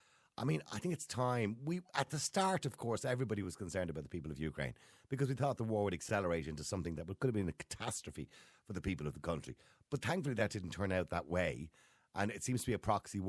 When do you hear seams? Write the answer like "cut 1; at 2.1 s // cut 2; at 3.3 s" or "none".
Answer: none